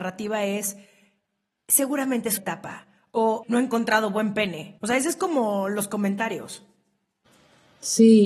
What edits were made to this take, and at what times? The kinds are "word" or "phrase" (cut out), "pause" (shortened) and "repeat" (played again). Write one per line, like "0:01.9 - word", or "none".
0:02.4 - word
0:03.4 - phrase
0:04.8 - pause